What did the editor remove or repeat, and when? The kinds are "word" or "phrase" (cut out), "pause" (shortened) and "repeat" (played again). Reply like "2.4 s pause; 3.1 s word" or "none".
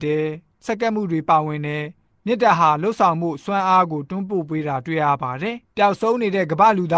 none